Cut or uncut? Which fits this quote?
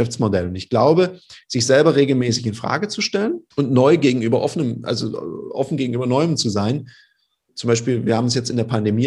cut